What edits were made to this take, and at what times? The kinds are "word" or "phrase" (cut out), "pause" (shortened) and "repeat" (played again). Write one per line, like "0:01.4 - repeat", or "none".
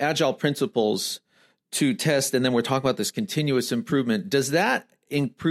none